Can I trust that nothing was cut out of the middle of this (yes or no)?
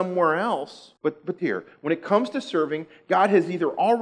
no